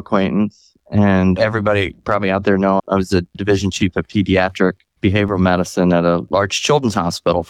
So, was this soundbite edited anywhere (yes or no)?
yes